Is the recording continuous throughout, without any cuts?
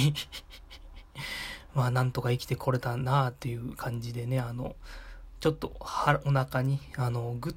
yes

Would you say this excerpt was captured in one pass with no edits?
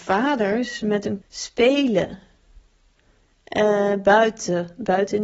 no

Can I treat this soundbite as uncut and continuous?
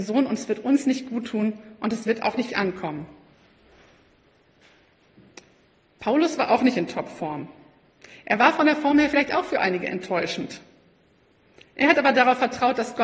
no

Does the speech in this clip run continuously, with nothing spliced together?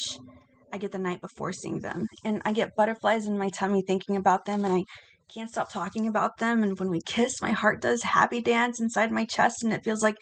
yes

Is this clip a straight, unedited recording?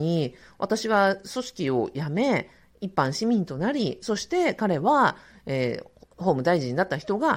yes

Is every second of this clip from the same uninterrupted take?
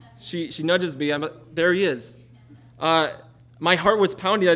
yes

